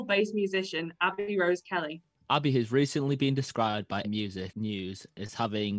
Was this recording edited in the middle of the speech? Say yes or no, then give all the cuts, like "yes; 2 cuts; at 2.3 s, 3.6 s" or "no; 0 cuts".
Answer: yes; 1 cut; at 4.0 s